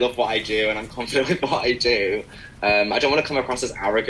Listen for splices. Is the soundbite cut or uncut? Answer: uncut